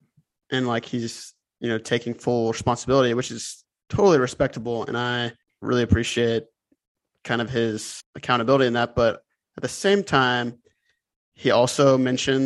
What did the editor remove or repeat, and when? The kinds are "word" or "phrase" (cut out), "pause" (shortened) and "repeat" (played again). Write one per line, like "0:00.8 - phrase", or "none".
none

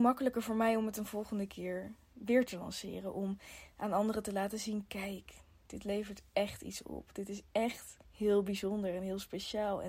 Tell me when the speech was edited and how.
0:08.0 - pause

